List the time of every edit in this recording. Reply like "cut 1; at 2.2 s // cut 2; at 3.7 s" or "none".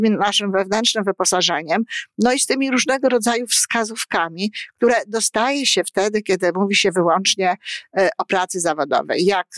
none